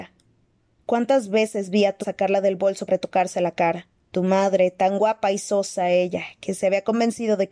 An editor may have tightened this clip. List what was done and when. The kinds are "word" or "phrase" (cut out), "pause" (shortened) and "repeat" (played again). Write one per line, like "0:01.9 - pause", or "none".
0:02.0 - word
0:02.9 - word
0:04.0 - pause